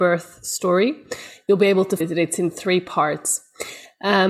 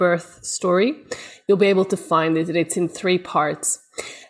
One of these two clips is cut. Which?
first; 1 cut; at 2.0 s

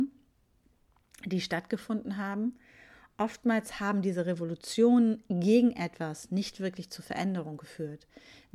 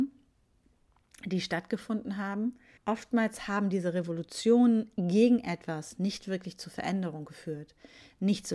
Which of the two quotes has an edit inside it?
second; 1 cut; at 2.8 s

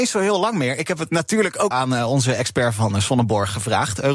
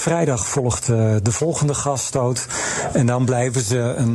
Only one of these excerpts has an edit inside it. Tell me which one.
first; 1 cut; at 1.7 s

